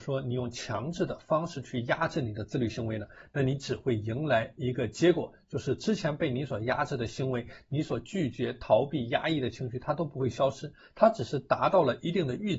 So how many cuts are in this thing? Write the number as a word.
zero